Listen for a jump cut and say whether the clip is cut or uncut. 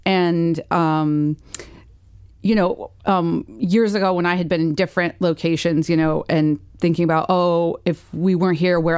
uncut